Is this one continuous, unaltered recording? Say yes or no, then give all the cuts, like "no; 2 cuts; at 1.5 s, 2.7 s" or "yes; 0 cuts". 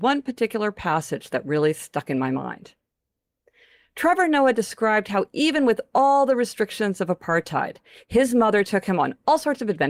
yes; 0 cuts